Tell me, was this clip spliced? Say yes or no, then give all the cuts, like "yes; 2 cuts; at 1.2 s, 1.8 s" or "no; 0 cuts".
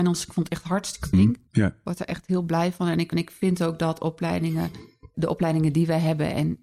yes; 4 cuts; at 1.1 s, 1.5 s, 3.1 s, 5.1 s